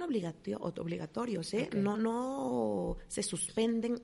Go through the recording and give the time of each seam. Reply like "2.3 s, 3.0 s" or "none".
1.9 s